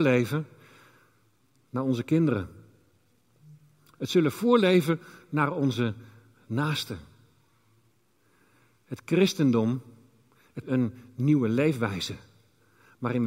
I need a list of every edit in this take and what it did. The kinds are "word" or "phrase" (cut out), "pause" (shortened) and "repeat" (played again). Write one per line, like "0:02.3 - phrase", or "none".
0:10.6 - phrase